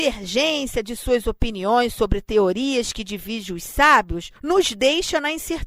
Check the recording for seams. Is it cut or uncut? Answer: cut